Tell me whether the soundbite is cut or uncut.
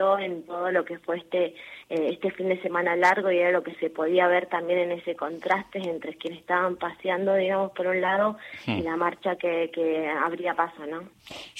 uncut